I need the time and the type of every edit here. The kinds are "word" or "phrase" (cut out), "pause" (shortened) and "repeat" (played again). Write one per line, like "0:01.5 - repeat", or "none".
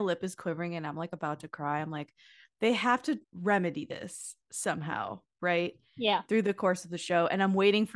0:03.2 - pause